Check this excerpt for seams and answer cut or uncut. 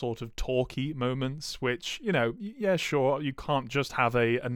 uncut